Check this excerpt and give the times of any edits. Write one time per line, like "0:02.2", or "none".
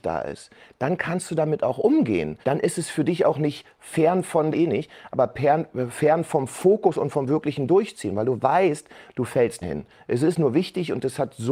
0:02.4
0:04.5
0:09.6